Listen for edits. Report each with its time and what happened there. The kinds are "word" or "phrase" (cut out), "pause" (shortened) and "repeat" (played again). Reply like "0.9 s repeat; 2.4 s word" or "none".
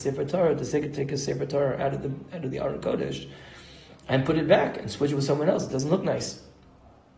none